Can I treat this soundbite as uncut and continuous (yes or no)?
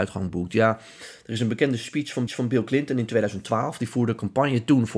no